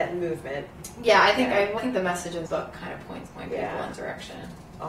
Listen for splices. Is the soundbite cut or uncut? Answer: cut